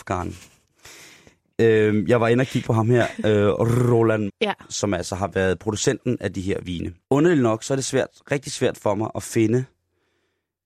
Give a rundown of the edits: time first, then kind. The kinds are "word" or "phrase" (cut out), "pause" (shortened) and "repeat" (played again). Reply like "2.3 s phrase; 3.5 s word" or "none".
2.6 s word; 4.3 s word; 7.0 s pause